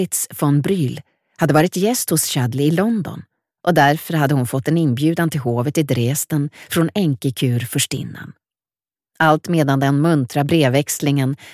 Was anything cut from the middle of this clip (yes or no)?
no